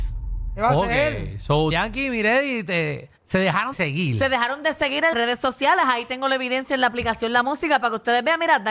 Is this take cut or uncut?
cut